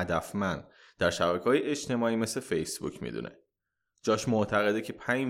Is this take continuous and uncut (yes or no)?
yes